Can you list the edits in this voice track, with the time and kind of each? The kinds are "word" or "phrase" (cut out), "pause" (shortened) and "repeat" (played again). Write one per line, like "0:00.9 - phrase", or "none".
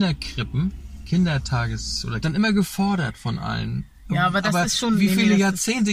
0:02.2 - phrase